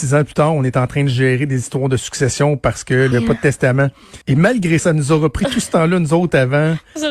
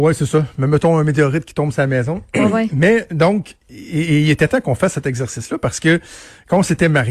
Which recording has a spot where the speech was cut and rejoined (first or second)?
first